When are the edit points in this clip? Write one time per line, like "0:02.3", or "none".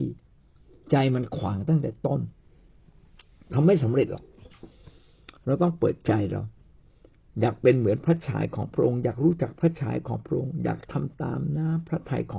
none